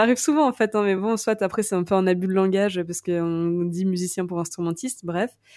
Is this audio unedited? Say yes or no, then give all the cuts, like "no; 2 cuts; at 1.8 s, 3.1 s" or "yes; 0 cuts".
yes; 0 cuts